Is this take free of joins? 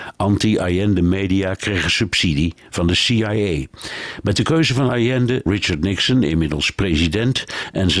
no; 1 cut; at 5.5 s

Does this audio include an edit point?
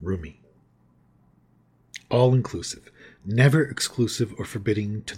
no; 0 cuts

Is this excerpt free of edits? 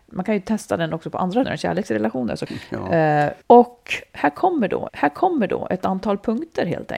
no; 4 cuts; at 1.4 s, 2.5 s, 3.4 s, 4.9 s

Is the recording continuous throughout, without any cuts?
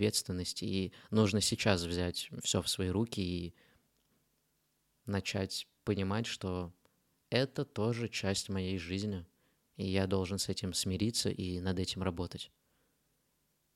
yes; 0 cuts

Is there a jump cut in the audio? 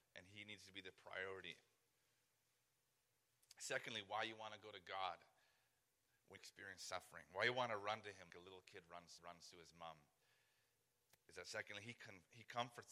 yes; 3 cuts; at 6.4 s, 8.3 s, 9.2 s

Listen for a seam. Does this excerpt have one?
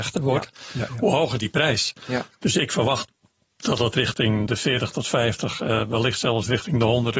yes; 1 cut; at 4.5 s

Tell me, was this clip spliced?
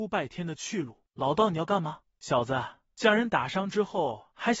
no; 0 cuts

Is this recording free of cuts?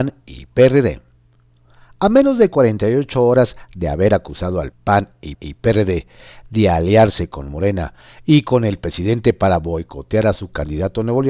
no; 2 cuts; at 4.7 s, 5.3 s

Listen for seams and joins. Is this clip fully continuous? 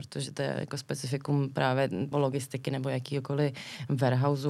no; 1 cut; at 2.1 s

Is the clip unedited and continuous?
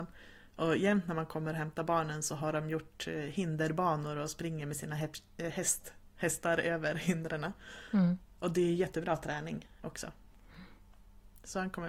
yes; 0 cuts

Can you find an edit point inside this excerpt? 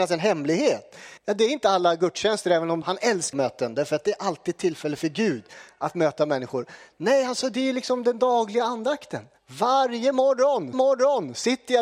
yes; 5 cuts; at 1.2 s, 2.8 s, 3.3 s, 9.4 s, 10.7 s

